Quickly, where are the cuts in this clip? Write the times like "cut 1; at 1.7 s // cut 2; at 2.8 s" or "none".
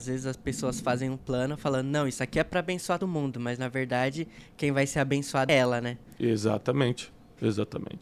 cut 1; at 3.0 s // cut 2; at 5.5 s